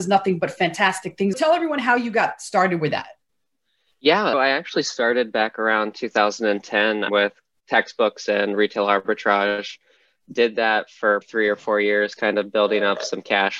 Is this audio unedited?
no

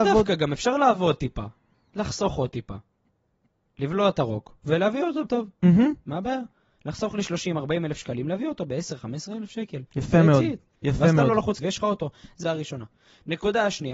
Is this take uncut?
no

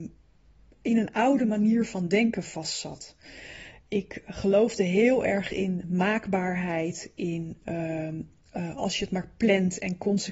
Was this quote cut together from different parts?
no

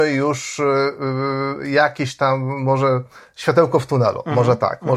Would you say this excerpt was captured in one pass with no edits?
yes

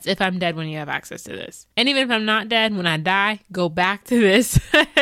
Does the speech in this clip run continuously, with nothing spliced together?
no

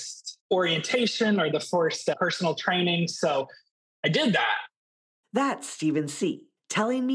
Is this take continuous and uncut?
yes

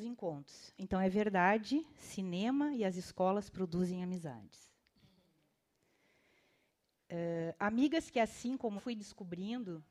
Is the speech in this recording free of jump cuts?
no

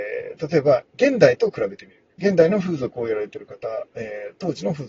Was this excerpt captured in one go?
no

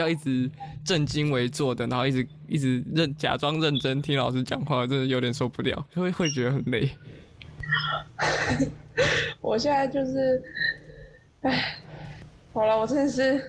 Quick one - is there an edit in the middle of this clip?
no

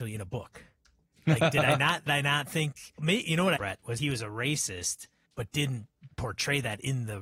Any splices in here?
yes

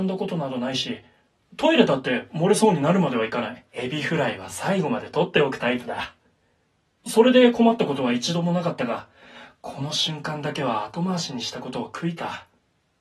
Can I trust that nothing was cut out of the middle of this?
no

